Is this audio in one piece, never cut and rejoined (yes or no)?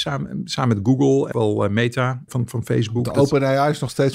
no